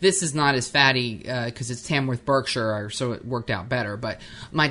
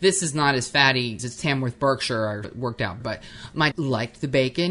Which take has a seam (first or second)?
second